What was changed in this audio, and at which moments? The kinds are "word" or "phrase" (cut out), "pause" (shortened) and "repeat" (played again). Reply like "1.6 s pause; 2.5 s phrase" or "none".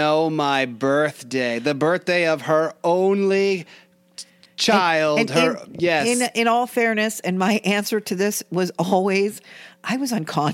none